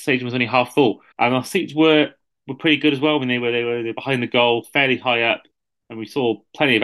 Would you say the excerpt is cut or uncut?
cut